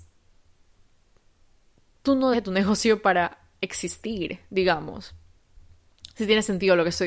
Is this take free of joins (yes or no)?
no